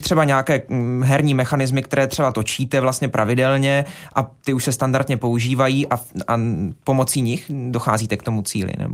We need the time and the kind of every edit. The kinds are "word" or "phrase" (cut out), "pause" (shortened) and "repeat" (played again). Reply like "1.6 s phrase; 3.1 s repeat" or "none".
none